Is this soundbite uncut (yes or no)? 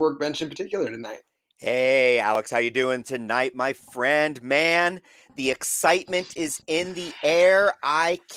yes